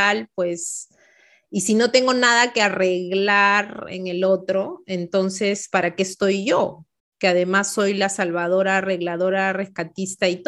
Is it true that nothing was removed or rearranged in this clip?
yes; 0 cuts

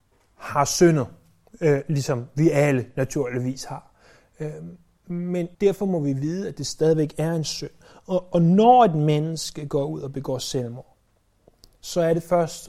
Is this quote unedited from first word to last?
no; 1 cut; at 5.5 s

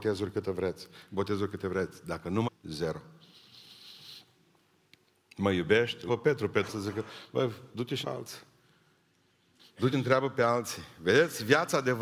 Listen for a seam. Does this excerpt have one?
yes; 6 cuts; at 2.4 s, 6.1 s, 6.7 s, 7.7 s, 8.0 s, 9.9 s

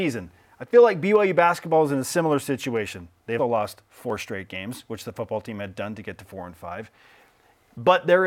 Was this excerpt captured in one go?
no; 1 cut; at 3.4 s

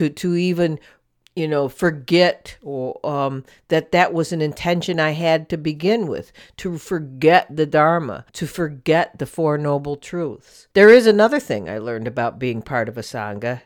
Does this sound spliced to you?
yes; 2 cuts; at 8.3 s, 10.7 s

